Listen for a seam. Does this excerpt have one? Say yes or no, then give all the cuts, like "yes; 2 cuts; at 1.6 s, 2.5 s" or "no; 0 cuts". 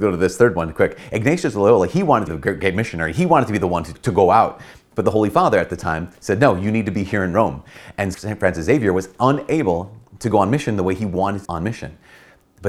yes; 4 cuts; at 2.3 s, 3.9 s, 8.1 s, 11.4 s